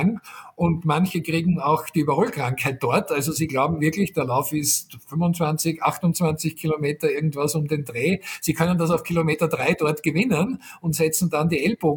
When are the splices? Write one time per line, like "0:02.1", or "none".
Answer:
none